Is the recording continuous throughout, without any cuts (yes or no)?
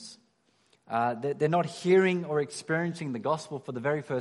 yes